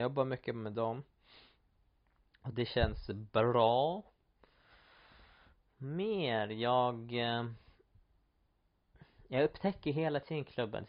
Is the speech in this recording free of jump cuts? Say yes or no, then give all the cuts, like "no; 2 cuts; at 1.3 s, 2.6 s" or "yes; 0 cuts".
yes; 0 cuts